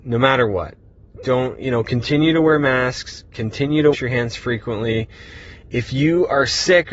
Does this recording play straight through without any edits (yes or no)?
no